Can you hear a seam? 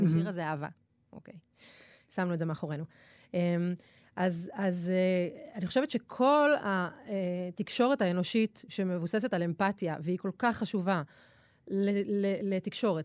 no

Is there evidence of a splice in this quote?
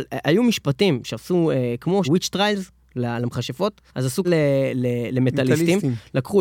yes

